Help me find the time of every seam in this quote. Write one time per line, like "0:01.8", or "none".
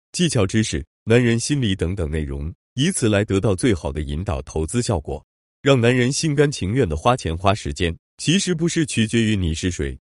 none